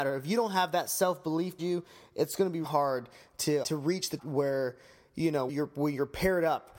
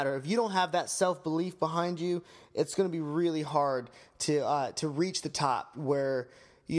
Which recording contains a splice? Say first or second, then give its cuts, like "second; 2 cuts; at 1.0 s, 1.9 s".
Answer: first; 5 cuts; at 1.6 s, 2.6 s, 3.6 s, 4.2 s, 5.5 s